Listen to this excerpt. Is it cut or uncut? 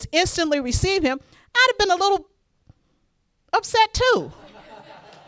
uncut